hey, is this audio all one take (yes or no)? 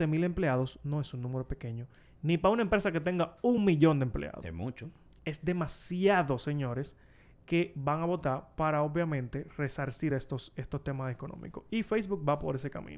yes